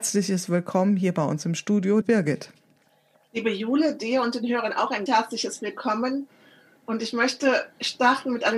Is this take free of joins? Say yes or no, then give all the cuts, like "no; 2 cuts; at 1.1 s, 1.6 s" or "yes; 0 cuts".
no; 2 cuts; at 2.0 s, 5.1 s